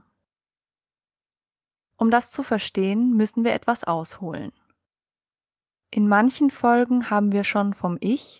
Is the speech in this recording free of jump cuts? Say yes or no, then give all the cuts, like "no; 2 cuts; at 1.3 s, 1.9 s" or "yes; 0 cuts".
yes; 0 cuts